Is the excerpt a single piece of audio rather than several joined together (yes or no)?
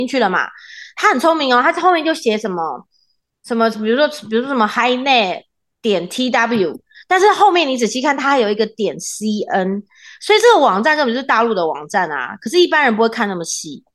yes